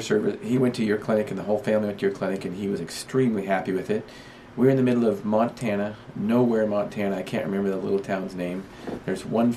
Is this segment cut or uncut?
uncut